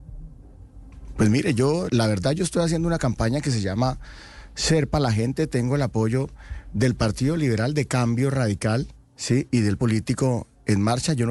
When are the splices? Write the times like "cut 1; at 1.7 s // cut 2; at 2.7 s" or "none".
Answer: cut 1; at 1.9 s // cut 2; at 9.8 s

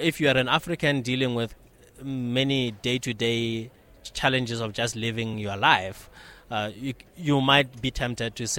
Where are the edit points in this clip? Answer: none

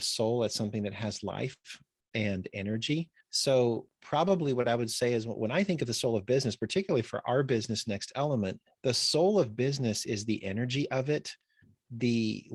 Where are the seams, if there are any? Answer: cut 1; at 2.0 s // cut 2; at 3.2 s // cut 3; at 8.7 s

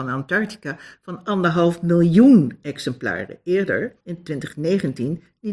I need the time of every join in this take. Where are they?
cut 1; at 4.0 s

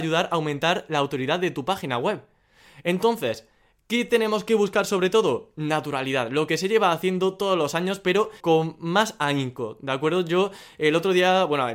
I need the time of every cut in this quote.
cut 1; at 8.4 s

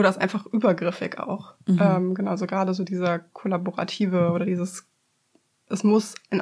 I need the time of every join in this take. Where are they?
none

